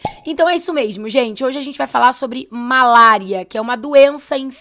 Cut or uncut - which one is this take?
uncut